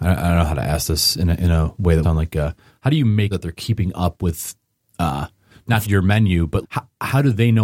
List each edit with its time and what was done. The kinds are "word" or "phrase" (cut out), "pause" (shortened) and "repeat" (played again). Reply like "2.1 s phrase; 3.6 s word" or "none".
2.0 s word; 3.3 s word; 5.8 s word; 6.6 s word